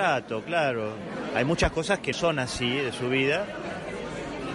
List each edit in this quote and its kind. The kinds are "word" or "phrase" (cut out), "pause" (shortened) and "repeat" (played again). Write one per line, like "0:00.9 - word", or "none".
0:02.1 - phrase